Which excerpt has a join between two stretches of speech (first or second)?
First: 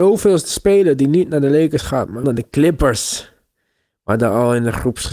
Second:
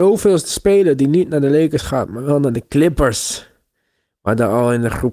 first